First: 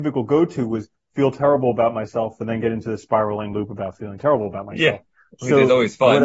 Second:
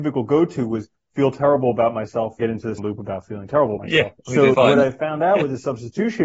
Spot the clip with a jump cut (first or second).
second